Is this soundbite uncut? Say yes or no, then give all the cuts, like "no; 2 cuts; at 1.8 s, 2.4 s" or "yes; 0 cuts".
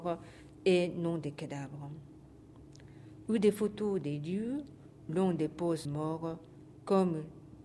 no; 2 cuts; at 5.1 s, 5.8 s